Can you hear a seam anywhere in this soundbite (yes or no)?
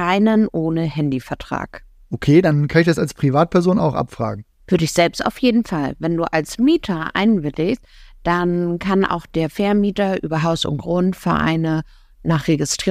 no